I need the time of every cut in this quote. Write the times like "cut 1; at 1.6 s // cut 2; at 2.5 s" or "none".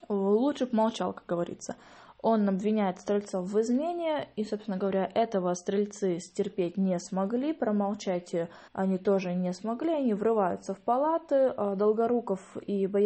cut 1; at 8.7 s

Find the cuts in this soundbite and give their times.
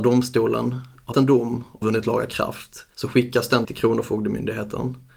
cut 1; at 1.1 s // cut 2; at 1.8 s // cut 3; at 2.9 s // cut 4; at 3.6 s

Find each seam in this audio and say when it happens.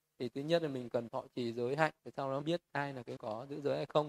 cut 1; at 1.1 s // cut 2; at 2.0 s // cut 3; at 2.4 s // cut 4; at 3.2 s

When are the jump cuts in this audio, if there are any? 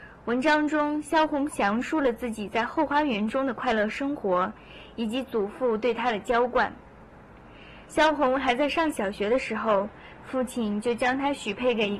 cut 1; at 7.9 s

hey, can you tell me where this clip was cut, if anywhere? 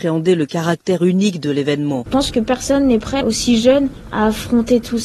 cut 1; at 3.2 s

